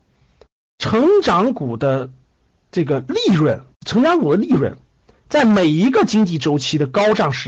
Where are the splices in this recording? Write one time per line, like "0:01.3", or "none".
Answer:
0:03.7